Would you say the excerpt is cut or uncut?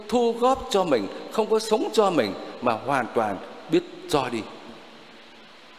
uncut